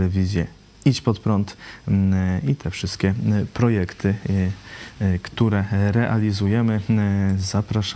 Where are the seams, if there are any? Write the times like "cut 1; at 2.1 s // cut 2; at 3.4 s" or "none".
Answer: none